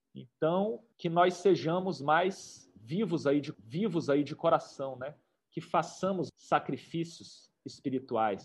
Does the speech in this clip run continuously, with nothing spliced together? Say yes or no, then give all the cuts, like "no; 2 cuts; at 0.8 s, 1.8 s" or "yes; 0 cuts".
no; 3 cuts; at 0.9 s, 3.5 s, 6.3 s